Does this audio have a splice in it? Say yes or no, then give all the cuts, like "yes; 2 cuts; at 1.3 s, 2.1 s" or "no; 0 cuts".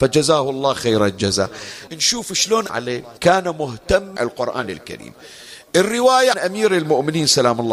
yes; 5 cuts; at 1.9 s, 2.7 s, 3.2 s, 4.2 s, 6.3 s